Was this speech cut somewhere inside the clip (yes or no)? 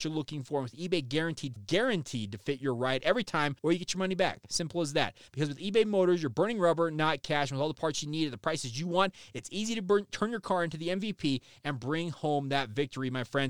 yes